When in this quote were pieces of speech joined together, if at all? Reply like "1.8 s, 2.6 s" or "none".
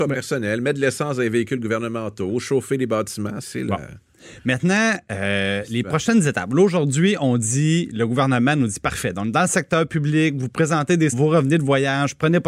3.4 s, 11.1 s